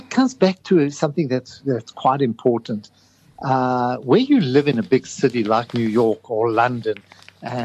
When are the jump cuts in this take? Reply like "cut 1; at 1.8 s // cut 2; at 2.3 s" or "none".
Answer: none

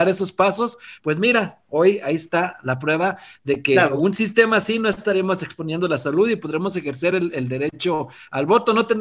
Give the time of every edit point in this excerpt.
none

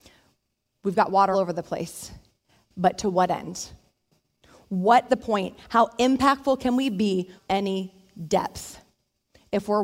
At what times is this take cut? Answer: cut 1; at 1.3 s // cut 2; at 5.1 s // cut 3; at 7.4 s

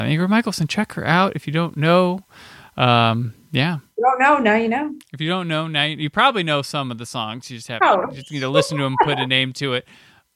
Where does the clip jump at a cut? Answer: none

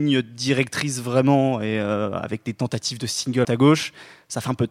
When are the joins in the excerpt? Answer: cut 1; at 3.4 s

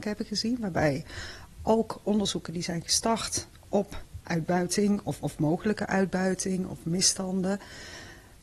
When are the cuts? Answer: cut 1; at 4.2 s // cut 2; at 5.2 s

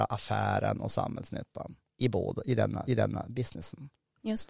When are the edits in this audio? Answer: cut 1; at 1.9 s // cut 2; at 2.9 s

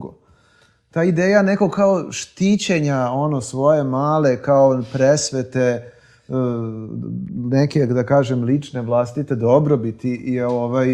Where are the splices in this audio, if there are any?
none

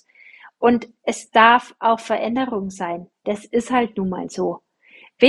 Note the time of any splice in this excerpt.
none

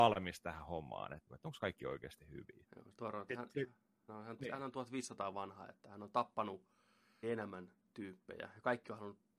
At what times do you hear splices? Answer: cut 1; at 1.3 s // cut 2; at 4.1 s // cut 3; at 4.4 s // cut 4; at 5.3 s // cut 5; at 7.2 s

